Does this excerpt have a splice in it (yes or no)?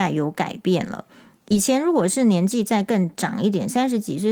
no